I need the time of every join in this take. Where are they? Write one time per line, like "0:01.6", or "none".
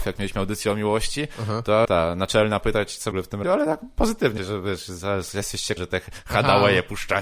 0:01.8
0:02.6
0:03.1
0:03.4
0:04.4
0:05.8